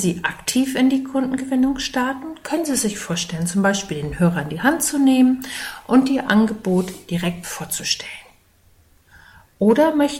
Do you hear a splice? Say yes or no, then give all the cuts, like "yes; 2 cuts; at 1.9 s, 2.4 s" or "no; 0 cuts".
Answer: no; 0 cuts